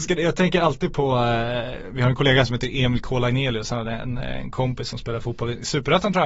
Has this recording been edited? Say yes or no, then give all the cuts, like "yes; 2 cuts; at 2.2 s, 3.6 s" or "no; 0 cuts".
no; 0 cuts